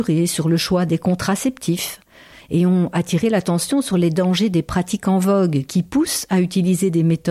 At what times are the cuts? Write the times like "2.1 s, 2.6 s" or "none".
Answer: none